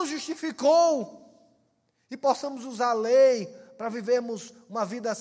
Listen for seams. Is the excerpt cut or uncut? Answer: uncut